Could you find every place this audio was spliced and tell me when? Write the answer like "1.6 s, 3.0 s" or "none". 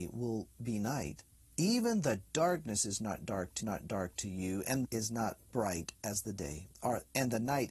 1.3 s, 3.6 s, 4.8 s